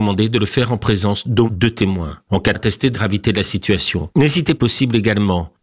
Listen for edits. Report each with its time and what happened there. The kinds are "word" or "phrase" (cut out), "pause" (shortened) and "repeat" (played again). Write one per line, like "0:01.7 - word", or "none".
0:01.5 - word
0:02.5 - phrase
0:02.9 - word
0:04.6 - phrase